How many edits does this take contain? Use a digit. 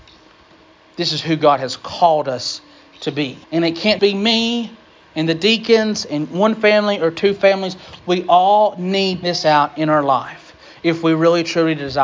3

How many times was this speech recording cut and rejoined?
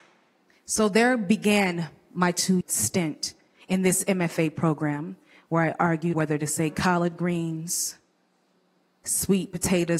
2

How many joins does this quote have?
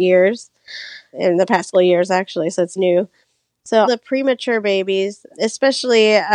5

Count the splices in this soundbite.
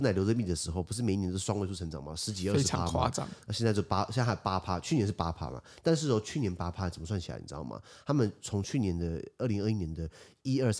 0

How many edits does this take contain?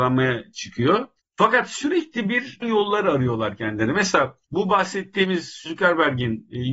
4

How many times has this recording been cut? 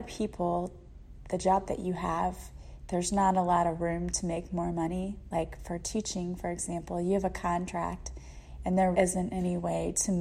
1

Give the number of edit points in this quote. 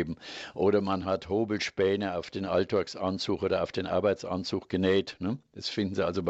0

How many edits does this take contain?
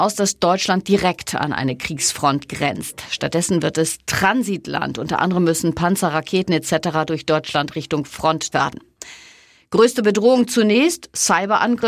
1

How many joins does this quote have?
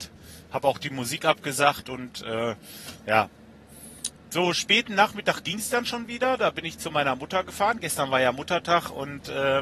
0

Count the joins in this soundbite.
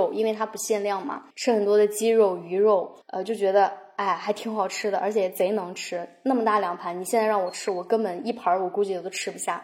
2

